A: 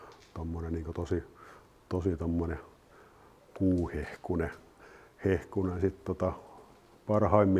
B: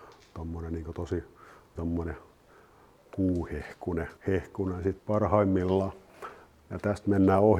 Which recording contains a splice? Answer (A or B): B